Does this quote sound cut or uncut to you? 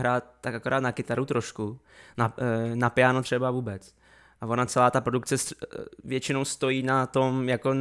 uncut